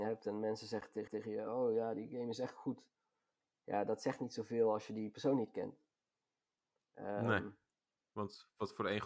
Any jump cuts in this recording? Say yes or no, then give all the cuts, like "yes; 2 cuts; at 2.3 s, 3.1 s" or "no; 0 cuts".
yes; 1 cut; at 1.1 s